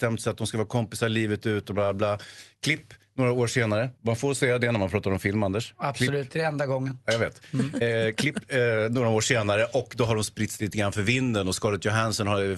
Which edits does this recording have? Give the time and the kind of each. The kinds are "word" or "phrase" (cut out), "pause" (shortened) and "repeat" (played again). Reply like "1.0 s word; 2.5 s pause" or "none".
4.0 s pause